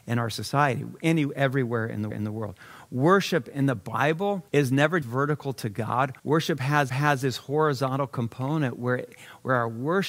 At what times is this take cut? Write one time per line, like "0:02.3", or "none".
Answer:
0:02.1
0:04.5
0:05.0
0:06.2
0:06.9